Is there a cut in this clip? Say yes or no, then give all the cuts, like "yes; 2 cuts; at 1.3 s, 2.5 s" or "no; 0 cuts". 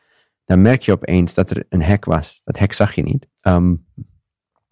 yes; 1 cut; at 3.3 s